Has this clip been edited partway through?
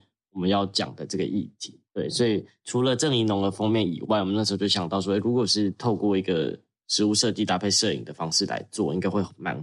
yes; 1 cut; at 1.9 s

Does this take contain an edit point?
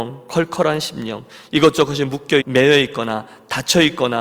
yes; 1 cut; at 2.4 s

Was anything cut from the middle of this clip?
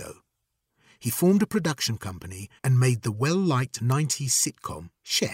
yes; 1 cut; at 2.6 s

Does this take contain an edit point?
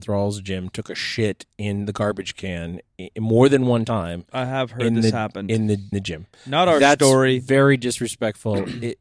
yes; 1 cut; at 5.9 s

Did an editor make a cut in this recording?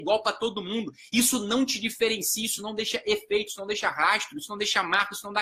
no; 0 cuts

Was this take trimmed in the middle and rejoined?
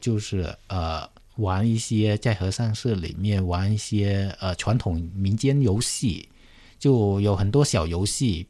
yes; 1 cut; at 1.2 s

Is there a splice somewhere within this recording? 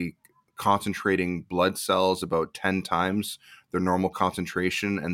no; 0 cuts

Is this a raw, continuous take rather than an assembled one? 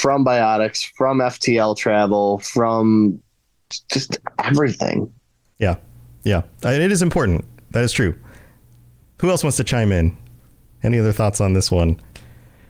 yes; 0 cuts

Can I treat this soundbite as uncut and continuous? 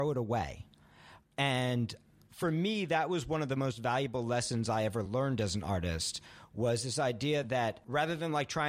yes; 0 cuts

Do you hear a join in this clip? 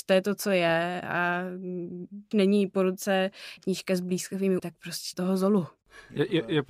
yes; 4 cuts; at 2.3 s, 3.6 s, 4.6 s, 5.1 s

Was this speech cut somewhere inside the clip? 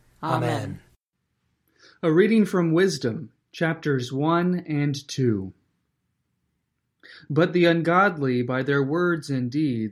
no; 0 cuts

